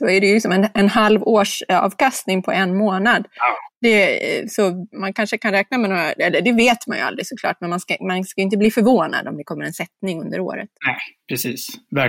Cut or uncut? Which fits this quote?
cut